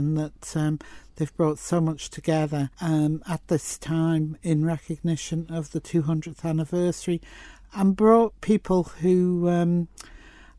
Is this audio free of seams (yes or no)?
no